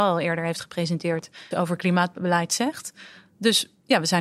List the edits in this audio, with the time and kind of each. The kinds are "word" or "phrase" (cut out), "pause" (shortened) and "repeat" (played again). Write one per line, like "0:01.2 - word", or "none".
0:01.5 - word